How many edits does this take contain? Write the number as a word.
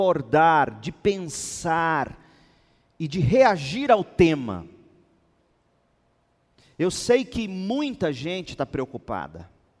zero